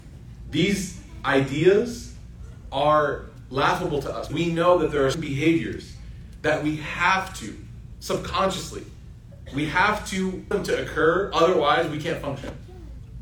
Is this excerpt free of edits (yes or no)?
no